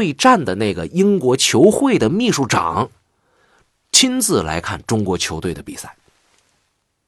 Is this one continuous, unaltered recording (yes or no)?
yes